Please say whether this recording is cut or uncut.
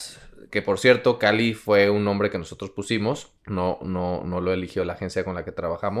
cut